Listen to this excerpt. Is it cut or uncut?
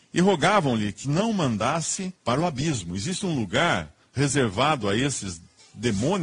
cut